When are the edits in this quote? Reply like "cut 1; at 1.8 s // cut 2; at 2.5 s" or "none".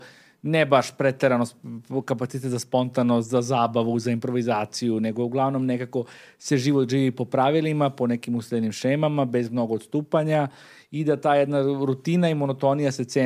none